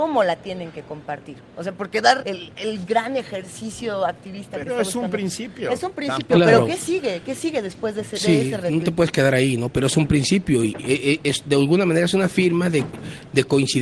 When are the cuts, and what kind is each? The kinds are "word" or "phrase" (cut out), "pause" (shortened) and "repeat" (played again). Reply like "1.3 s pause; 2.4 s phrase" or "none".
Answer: 2.2 s phrase; 10.8 s word